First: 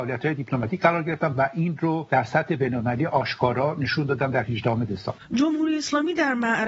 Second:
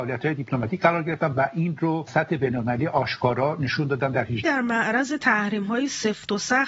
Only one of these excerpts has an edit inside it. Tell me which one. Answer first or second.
second